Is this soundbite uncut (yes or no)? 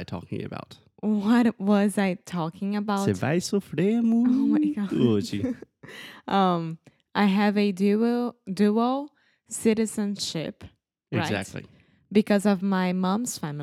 yes